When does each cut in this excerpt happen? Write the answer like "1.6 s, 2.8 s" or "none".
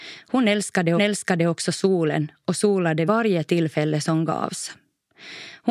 1.0 s, 3.1 s